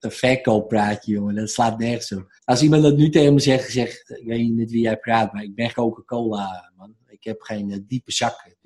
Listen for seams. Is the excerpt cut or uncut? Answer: cut